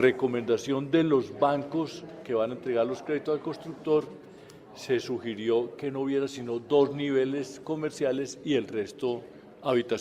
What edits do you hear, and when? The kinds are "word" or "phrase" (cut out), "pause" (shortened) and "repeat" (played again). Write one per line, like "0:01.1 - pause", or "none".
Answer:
none